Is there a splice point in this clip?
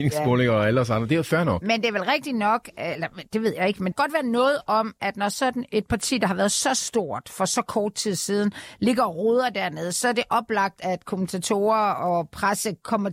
yes; 1 cut; at 3.9 s

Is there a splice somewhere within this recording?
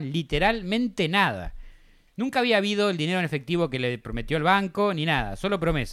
no; 0 cuts

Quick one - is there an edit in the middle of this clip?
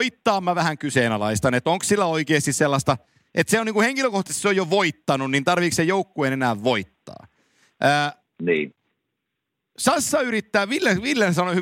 no; 0 cuts

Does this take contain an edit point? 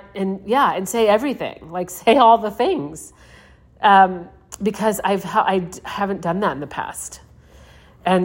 no; 0 cuts

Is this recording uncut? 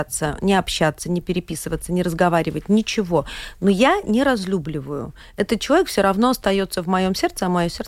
yes; 0 cuts

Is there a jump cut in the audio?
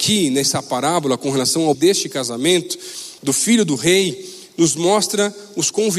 yes; 2 cuts; at 1.7 s, 3.2 s

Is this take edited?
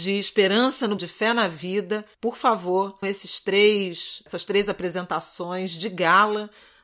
yes; 3 cuts; at 1.0 s, 2.1 s, 3.0 s

